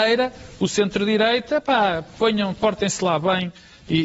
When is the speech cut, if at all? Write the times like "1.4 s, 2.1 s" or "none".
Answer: none